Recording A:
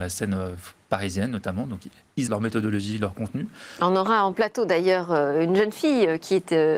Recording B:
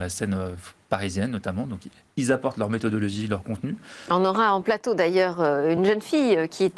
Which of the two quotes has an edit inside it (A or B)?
A